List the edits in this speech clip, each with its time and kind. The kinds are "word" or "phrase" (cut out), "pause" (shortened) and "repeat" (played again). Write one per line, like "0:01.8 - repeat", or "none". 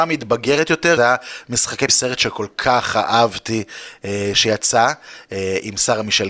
0:01.0 - word
0:01.9 - word